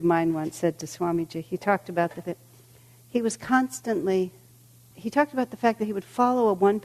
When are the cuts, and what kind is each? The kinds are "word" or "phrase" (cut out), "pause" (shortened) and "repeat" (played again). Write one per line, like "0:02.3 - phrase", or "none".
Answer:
0:02.2 - word
0:04.9 - word

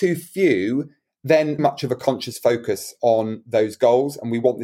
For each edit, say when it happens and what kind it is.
0:01.6 - phrase

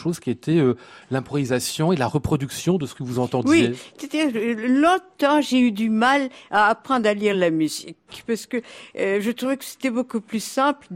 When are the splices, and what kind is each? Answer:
none

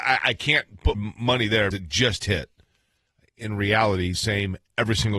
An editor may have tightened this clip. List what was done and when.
0:00.9 - word
0:01.7 - word
0:04.1 - phrase

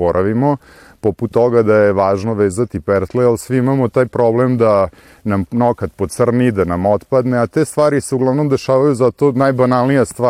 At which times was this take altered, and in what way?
none

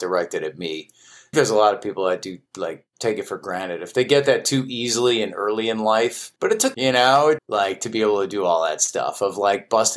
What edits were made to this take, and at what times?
0:01.3 - word
0:02.5 - pause
0:06.4 - pause
0:06.7 - phrase
0:07.4 - phrase

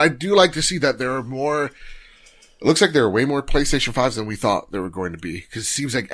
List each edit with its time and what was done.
none

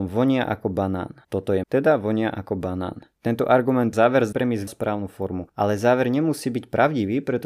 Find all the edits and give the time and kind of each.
0:01.2 - pause
0:01.6 - word
0:03.1 - pause
0:03.9 - phrase
0:04.3 - word
0:04.7 - phrase

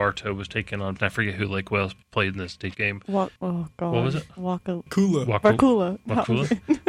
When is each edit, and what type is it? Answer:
0:01.0 - word
0:02.0 - pause
0:02.7 - word
0:03.4 - pause
0:04.9 - word

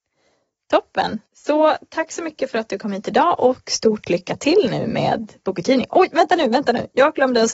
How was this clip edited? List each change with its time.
0:01.2 - pause

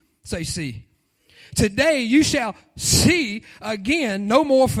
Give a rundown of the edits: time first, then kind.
none

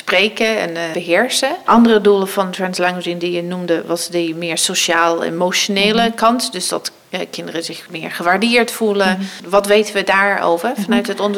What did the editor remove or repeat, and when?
none

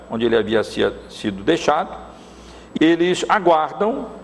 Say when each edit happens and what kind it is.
0:02.8 - word

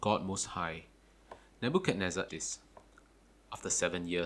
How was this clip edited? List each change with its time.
0:02.3 - word

